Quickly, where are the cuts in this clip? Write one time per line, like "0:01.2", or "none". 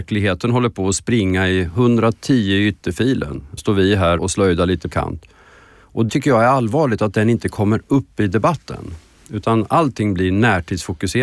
0:03.6
0:04.2
0:04.9
0:06.1

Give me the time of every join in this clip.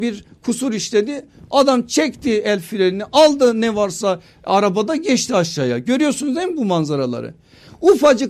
none

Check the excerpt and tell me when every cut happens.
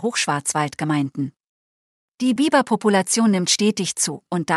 none

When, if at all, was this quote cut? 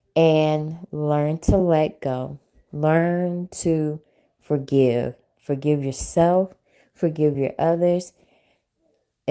none

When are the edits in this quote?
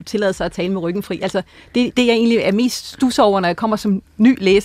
none

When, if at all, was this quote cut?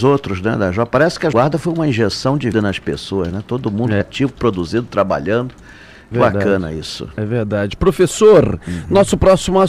0:01.3
0:02.5
0:04.0
0:06.1

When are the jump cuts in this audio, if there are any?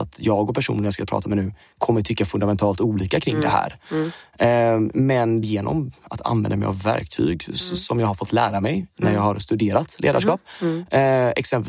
0:05.4

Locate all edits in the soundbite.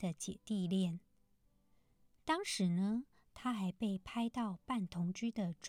none

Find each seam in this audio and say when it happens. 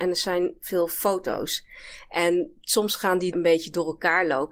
0:03.3

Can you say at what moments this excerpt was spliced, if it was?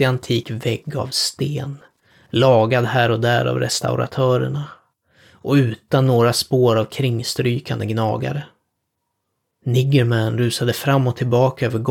none

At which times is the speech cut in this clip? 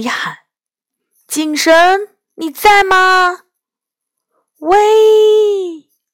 none

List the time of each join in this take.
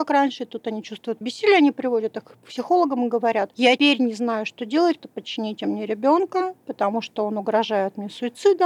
0:01.2
0:03.8
0:05.0

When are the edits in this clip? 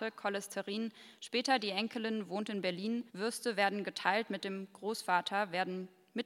0:03.1

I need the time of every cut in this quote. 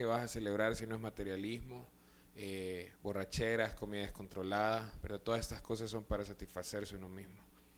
0:03.0

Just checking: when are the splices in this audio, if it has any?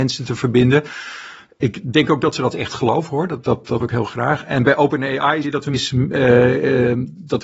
0:03.4
0:03.8
0:05.4
0:05.7

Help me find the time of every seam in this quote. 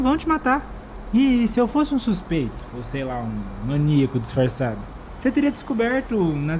none

